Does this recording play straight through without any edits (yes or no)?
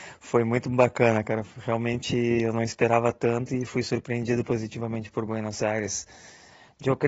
yes